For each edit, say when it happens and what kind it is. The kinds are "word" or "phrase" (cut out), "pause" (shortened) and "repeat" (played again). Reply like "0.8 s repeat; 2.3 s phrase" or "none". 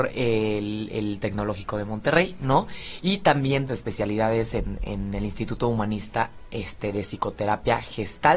3.7 s phrase